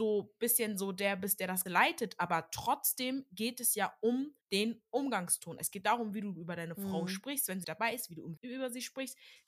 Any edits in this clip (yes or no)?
yes